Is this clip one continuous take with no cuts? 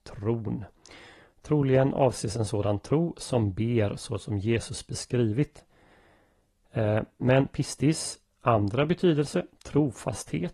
yes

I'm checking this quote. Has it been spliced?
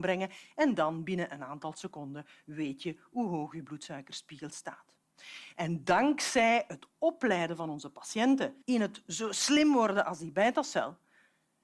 yes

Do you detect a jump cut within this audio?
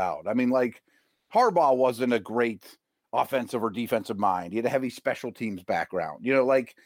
no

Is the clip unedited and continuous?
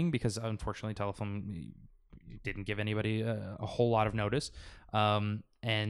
yes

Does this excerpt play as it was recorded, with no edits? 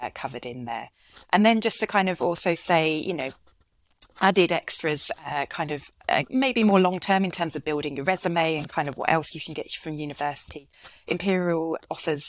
yes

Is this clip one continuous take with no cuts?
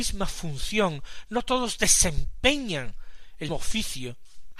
no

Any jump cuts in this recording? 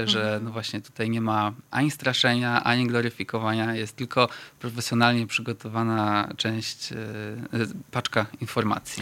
no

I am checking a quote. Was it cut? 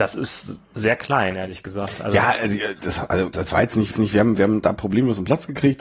yes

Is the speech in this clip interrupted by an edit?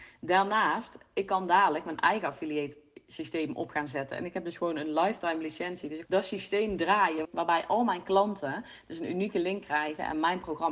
yes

